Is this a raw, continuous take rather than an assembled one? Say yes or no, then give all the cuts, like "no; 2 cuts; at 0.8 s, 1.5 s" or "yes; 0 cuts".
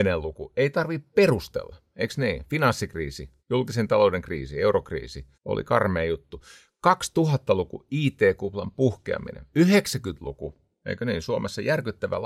no; 2 cuts; at 3.4 s, 5.3 s